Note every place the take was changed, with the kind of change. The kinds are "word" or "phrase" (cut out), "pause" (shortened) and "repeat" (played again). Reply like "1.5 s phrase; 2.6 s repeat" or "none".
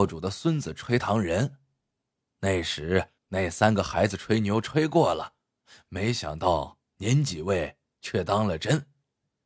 3.2 s pause